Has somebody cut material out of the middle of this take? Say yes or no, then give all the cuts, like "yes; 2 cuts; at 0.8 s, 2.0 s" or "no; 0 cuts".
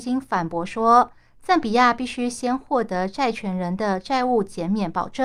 no; 0 cuts